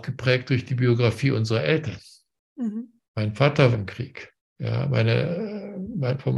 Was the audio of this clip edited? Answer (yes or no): yes